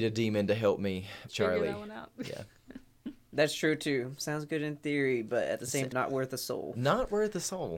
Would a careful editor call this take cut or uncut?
cut